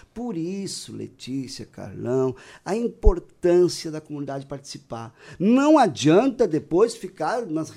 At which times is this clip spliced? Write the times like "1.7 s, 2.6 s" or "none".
none